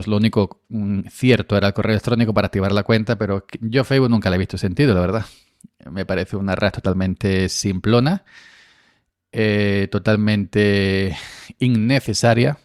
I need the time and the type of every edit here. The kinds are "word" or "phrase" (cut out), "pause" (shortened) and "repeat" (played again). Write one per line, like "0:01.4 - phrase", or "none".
none